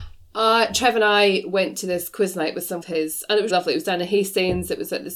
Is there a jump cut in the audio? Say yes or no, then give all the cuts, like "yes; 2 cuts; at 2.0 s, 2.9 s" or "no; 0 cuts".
yes; 2 cuts; at 2.8 s, 3.5 s